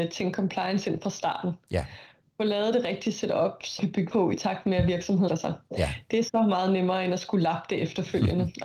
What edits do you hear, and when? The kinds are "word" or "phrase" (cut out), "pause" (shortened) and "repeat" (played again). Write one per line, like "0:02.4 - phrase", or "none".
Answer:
0:03.8 - word
0:04.1 - word
0:05.3 - word